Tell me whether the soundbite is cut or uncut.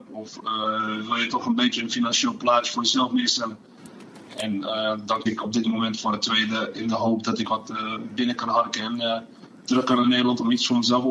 cut